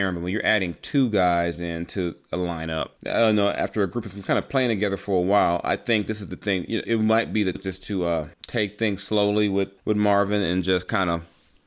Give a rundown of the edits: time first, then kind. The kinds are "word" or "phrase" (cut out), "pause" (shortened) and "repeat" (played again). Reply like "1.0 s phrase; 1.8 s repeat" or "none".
3.0 s pause; 6.8 s word; 7.5 s phrase; 8.3 s pause; 9.8 s pause